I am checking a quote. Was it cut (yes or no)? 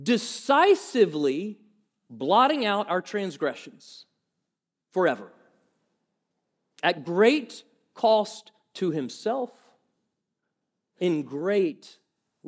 no